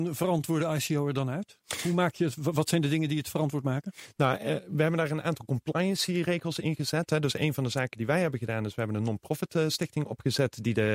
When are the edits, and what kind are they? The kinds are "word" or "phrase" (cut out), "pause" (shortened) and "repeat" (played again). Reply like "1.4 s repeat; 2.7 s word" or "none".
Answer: none